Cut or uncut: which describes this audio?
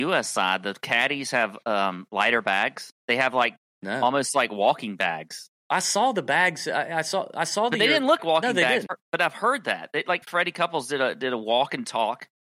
cut